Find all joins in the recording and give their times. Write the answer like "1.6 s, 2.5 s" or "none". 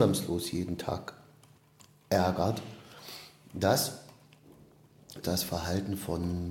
5.2 s